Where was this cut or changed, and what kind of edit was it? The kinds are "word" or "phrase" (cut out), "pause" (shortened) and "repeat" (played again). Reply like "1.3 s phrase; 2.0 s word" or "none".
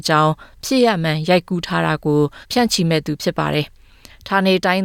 2.4 s pause

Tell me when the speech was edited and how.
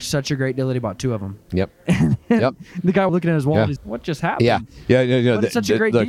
3.1 s phrase; 3.8 s word

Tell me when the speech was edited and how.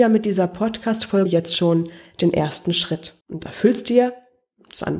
1.3 s word; 3.2 s pause

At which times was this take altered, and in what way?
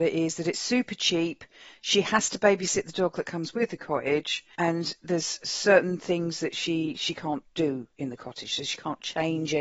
none

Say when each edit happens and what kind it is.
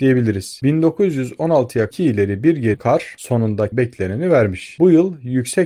1.9 s word; 2.7 s word; 3.7 s word

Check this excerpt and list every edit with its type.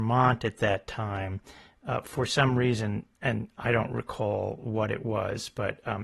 none

